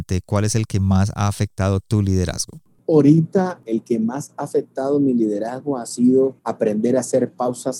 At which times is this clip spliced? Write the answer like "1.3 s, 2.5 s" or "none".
2.8 s, 6.4 s

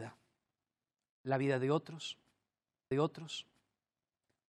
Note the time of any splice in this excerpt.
2.9 s

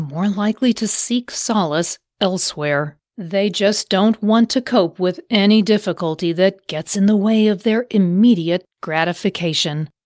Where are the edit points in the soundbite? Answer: 3.1 s

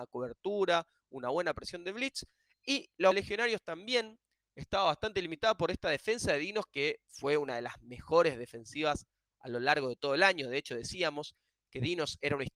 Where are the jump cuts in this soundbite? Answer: 3.1 s

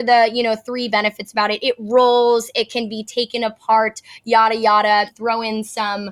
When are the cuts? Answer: 5.1 s

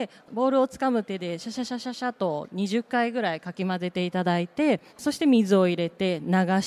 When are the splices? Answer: 4.9 s

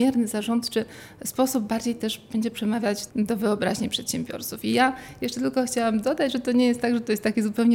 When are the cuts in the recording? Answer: 3.1 s

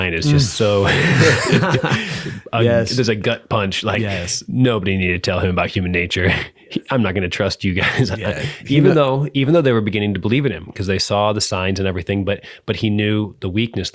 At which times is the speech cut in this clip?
none

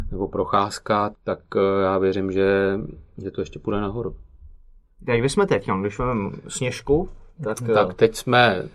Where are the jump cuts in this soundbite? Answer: 1.1 s

